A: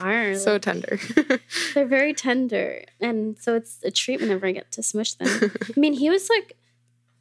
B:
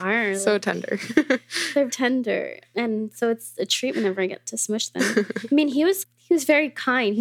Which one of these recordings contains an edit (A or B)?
B